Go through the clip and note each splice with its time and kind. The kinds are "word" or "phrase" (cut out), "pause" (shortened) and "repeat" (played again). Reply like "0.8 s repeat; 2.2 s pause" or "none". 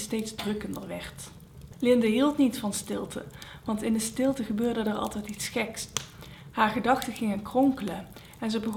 none